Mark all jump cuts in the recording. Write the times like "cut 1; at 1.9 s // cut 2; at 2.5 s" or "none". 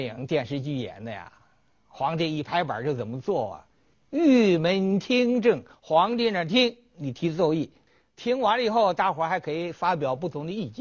none